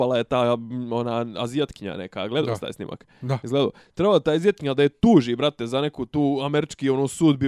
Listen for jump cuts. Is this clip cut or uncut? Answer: uncut